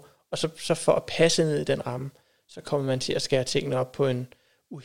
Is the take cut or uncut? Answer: uncut